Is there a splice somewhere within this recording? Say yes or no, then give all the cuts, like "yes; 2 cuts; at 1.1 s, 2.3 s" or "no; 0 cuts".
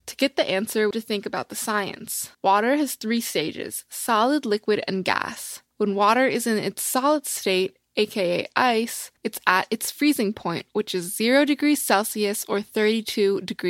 yes; 4 cuts; at 0.9 s, 2.3 s, 5.7 s, 9.2 s